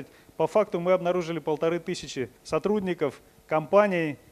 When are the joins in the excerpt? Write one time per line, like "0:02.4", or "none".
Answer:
0:02.4